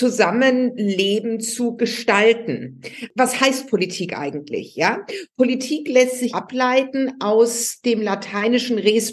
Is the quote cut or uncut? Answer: cut